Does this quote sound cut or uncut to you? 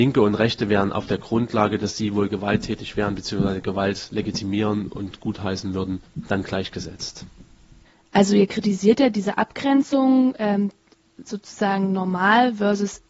uncut